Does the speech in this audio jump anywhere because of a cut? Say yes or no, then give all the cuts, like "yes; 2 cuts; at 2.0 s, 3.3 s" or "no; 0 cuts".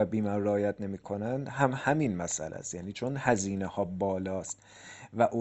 no; 0 cuts